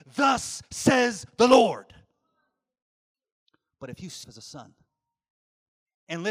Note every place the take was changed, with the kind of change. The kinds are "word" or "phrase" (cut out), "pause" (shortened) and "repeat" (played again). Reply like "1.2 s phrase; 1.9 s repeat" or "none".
4.2 s word